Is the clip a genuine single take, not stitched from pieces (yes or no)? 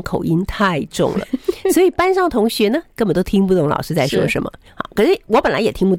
no